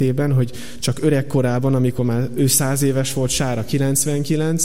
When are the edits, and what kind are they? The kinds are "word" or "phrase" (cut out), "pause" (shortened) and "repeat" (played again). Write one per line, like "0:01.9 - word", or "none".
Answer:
none